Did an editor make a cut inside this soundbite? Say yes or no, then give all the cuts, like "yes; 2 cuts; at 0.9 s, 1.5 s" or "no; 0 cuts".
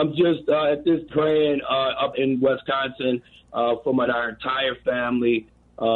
yes; 3 cuts; at 1.1 s, 2.1 s, 4.1 s